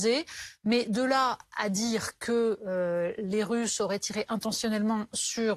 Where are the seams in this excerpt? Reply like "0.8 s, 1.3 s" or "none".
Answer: none